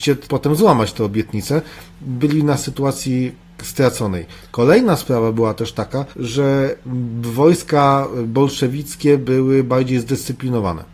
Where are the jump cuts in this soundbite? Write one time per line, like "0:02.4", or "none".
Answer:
0:06.1